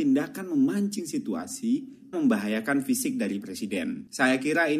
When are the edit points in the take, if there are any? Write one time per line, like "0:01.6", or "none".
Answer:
0:02.1
0:03.4